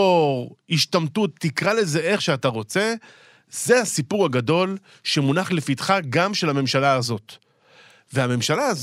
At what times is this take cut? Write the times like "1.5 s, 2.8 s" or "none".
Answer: none

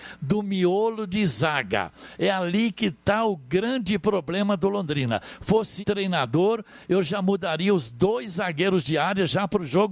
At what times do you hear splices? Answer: 5.8 s

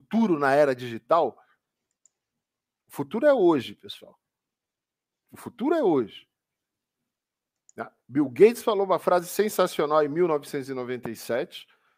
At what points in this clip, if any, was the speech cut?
none

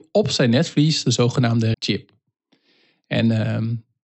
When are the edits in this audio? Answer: 1.7 s

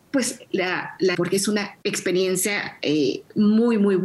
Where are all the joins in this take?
1.1 s, 1.8 s

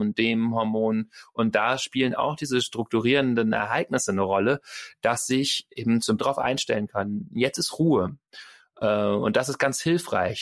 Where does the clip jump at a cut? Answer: 6.2 s

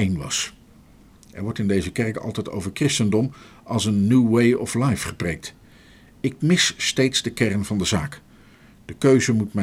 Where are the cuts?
none

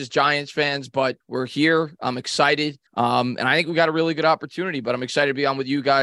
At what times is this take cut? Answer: 1.2 s, 2.9 s

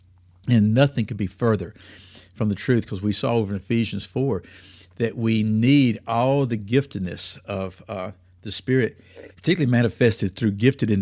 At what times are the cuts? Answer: 9.3 s

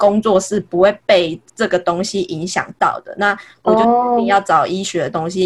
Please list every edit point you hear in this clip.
1.5 s

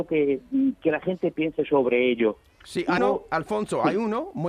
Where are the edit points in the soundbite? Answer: 1.3 s, 3.0 s

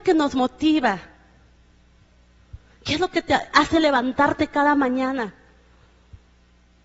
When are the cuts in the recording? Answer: none

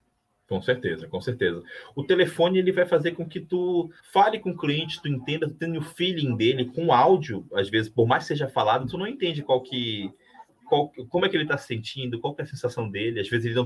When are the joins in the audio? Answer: 4.0 s, 10.5 s

